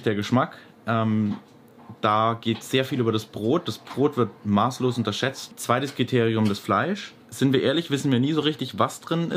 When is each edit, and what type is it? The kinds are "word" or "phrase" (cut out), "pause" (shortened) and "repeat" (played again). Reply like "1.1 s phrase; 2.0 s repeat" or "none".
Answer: 7.2 s pause